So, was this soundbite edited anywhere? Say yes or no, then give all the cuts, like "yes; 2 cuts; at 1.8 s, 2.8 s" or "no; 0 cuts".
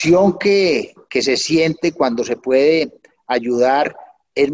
no; 0 cuts